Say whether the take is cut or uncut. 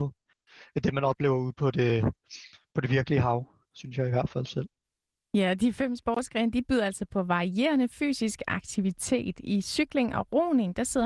uncut